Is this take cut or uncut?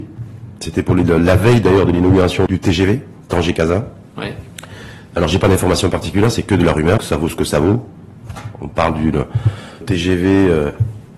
cut